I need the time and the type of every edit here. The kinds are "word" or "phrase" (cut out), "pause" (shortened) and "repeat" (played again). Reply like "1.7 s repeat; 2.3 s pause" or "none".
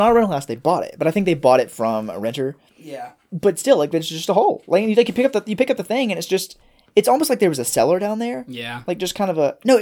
none